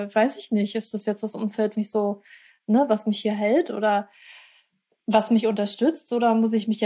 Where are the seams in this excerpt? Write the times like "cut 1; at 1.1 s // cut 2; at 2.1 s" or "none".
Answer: cut 1; at 1.7 s